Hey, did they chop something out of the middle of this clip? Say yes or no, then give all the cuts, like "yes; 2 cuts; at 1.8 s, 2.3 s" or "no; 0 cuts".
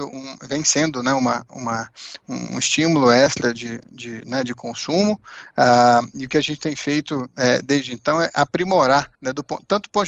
yes; 1 cut; at 9.1 s